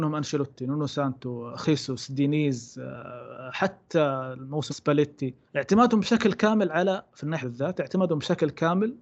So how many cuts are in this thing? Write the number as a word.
three